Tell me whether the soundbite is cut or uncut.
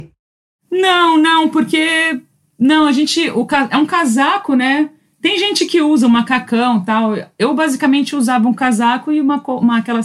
uncut